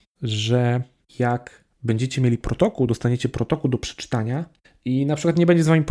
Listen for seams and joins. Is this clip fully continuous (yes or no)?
yes